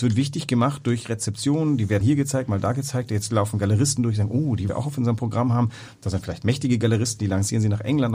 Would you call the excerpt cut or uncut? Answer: cut